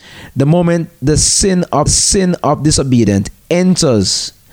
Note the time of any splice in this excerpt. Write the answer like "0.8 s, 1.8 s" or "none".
1.9 s